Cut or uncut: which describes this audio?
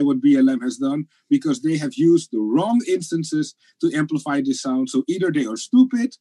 uncut